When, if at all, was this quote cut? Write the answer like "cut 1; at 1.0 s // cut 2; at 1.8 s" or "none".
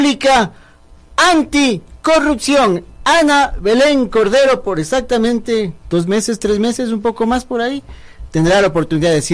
cut 1; at 5.8 s